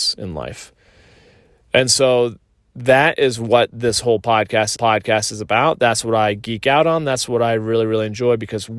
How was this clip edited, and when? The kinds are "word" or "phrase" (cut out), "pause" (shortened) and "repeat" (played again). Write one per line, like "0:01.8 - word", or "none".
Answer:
0:04.8 - repeat